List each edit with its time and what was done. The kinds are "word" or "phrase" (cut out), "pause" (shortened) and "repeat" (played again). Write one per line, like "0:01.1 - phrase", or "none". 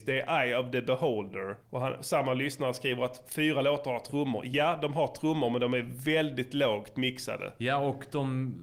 0:01.6 - pause